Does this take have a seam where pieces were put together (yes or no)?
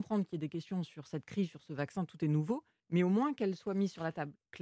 yes